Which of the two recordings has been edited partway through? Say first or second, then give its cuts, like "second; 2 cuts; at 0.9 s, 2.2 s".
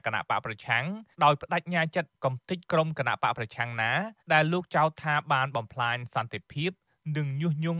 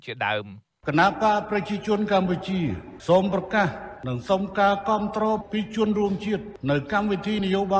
first; 2 cuts; at 1.1 s, 4.2 s